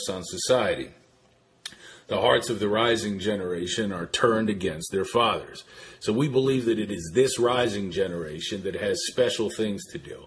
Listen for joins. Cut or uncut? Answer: uncut